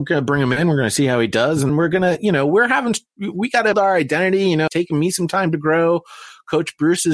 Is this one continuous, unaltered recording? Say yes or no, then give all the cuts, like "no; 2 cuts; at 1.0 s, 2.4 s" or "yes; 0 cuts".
no; 3 cuts; at 1.7 s, 3.7 s, 4.7 s